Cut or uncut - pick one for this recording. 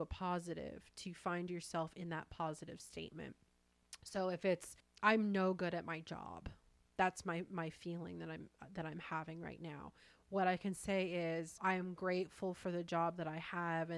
uncut